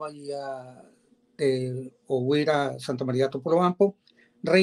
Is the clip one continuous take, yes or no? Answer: yes